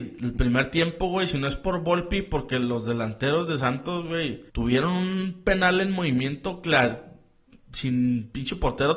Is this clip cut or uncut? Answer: cut